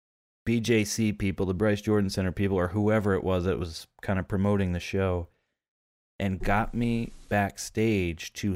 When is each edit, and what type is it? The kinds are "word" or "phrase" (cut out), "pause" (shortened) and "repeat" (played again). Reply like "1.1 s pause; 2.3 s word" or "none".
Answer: none